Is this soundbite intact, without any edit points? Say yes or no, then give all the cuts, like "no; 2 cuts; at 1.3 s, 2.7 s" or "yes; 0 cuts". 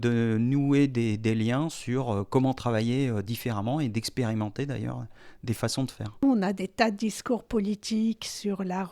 yes; 0 cuts